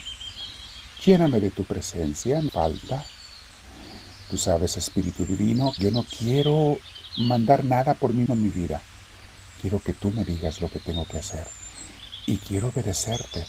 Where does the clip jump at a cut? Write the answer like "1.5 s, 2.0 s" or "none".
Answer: 2.5 s, 5.8 s, 8.3 s